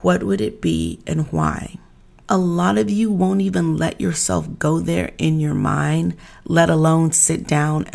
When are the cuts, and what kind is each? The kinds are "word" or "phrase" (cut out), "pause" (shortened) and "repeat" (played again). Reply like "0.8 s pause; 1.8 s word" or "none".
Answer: none